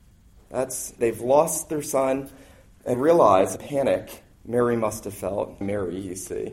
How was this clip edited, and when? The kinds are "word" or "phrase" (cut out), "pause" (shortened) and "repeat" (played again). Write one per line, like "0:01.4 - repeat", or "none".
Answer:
0:01.0 - phrase
0:02.9 - word
0:03.6 - phrase
0:04.3 - pause
0:05.6 - word

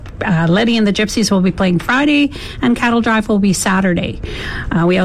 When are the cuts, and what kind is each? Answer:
none

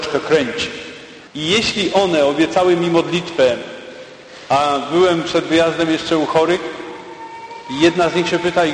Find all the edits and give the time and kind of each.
0:01.3 - pause

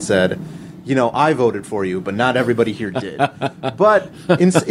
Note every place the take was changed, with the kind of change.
none

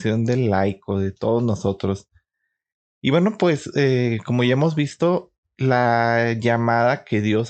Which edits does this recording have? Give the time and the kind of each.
none

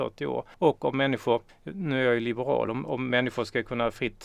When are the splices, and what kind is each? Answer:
none

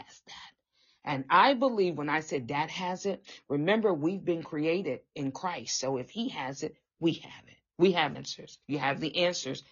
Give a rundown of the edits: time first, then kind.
0:08.1 - word
0:08.6 - pause

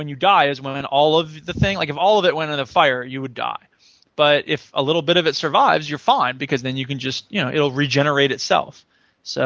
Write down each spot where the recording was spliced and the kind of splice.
none

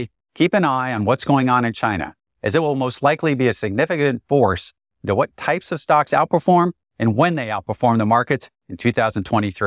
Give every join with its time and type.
none

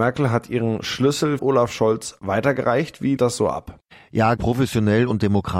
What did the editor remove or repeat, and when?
0:01.4 - phrase
0:03.2 - word
0:04.4 - word

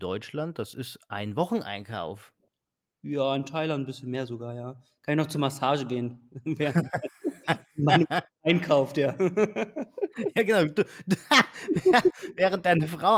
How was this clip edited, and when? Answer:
none

